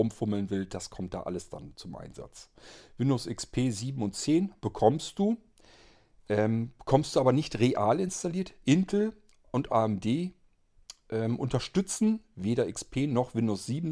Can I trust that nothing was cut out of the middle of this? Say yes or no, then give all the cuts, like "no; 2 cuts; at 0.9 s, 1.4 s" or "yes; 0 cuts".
no; 2 cuts; at 4.6 s, 9.7 s